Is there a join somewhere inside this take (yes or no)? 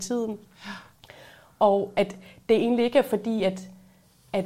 no